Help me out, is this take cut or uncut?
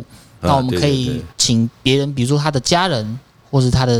cut